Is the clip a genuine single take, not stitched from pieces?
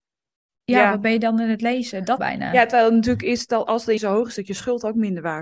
no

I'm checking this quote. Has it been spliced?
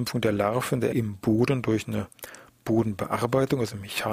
yes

